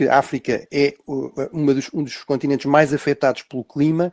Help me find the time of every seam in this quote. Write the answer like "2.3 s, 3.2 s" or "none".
none